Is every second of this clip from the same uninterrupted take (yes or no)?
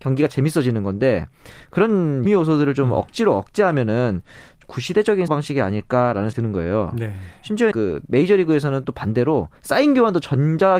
no